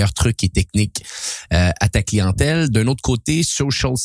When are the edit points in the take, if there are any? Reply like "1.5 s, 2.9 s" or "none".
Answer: none